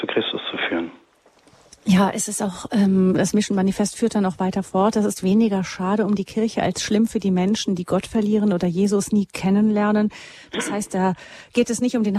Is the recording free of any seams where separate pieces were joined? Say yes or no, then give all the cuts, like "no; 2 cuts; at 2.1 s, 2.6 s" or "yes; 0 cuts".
yes; 0 cuts